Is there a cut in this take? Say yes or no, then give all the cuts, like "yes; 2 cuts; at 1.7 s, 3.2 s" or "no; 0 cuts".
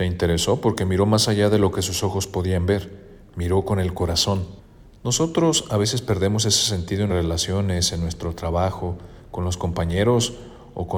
yes; 1 cut; at 7.1 s